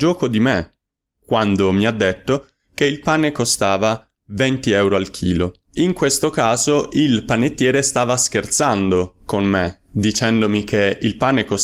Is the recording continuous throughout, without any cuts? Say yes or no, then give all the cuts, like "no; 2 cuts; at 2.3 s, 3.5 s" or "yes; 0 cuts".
no; 1 cut; at 5.6 s